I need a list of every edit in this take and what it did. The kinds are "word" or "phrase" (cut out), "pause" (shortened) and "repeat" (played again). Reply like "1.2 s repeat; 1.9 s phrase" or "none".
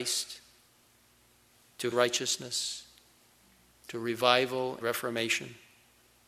1.9 s word; 4.8 s word